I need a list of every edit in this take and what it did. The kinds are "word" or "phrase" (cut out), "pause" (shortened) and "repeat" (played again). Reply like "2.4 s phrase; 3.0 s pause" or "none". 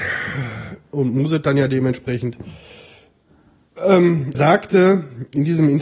4.3 s word